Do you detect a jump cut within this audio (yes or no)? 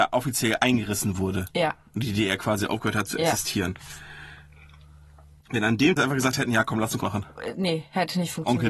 yes